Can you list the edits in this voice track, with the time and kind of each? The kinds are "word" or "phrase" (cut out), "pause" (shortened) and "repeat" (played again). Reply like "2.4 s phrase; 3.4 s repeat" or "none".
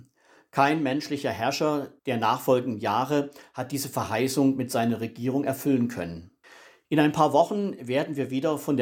2.0 s pause; 6.4 s pause